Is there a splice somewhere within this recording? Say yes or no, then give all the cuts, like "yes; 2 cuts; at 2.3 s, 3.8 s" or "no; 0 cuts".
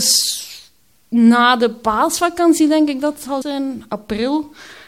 yes; 1 cut; at 3.4 s